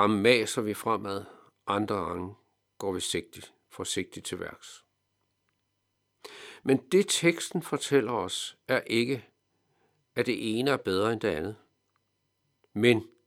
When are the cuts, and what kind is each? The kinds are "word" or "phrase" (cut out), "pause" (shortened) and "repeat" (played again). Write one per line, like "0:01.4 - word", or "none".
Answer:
none

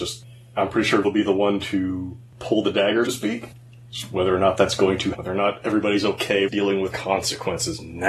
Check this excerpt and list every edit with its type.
0:01.0 - word
0:03.1 - word
0:05.1 - word
0:06.5 - word
0:06.9 - word

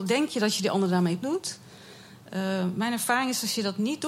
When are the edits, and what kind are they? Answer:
0:01.2 - word

